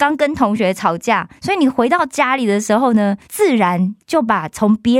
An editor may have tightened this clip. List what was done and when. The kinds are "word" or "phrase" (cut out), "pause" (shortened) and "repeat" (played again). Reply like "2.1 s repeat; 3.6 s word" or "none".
1.4 s pause; 3.2 s pause